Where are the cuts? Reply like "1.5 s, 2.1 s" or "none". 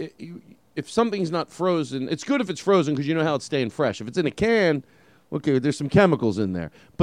none